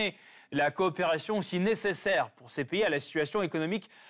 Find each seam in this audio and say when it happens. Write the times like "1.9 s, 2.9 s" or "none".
none